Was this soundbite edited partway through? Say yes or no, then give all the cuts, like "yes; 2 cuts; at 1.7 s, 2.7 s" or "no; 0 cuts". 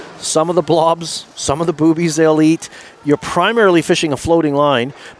no; 0 cuts